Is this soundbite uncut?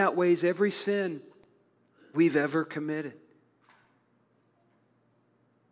no; 1 cut; at 2.1 s

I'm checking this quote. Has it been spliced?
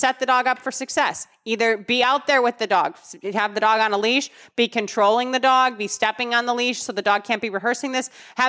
no; 0 cuts

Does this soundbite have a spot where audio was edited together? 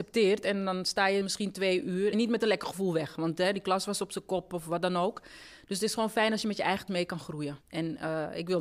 yes; 4 cuts; at 1.2 s, 2.1 s, 6.9 s, 7.6 s

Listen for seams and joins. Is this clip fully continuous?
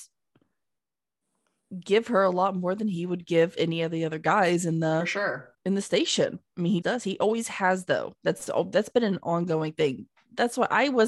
no; 2 cuts; at 5.5 s, 6.8 s

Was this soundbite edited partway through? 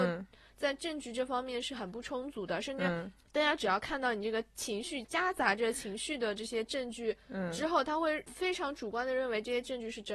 yes; 1 cut; at 5.0 s

